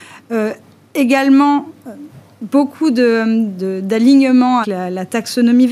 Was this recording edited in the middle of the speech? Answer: yes; 1 cut; at 4.6 s

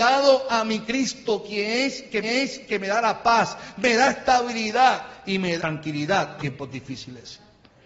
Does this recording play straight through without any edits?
no; 3 cuts; at 2.2 s, 5.6 s, 6.4 s

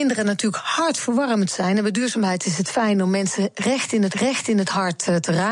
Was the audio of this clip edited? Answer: yes; 1 cut; at 4.1 s

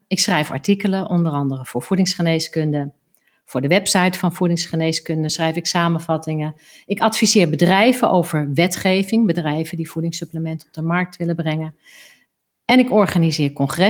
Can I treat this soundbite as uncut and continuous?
yes; 0 cuts

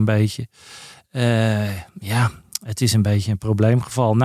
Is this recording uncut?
yes; 0 cuts

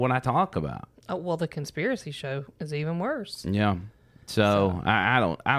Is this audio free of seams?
yes; 0 cuts

